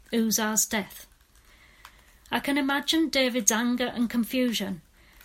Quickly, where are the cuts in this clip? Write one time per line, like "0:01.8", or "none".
none